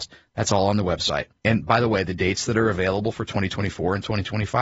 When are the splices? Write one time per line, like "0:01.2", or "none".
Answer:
0:01.4